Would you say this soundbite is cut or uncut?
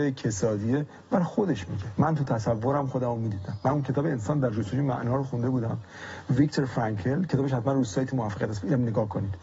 uncut